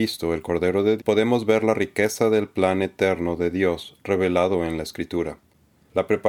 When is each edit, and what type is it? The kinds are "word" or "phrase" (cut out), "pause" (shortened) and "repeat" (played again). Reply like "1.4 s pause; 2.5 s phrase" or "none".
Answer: 1.0 s word